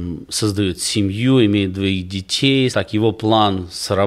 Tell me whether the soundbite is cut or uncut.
cut